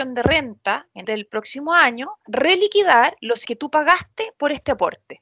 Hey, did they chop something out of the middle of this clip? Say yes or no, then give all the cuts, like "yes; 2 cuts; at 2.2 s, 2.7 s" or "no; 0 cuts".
yes; 3 cuts; at 1.0 s, 2.3 s, 3.4 s